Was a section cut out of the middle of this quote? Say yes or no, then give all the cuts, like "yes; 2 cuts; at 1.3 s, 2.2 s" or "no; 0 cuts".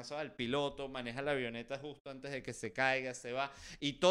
no; 0 cuts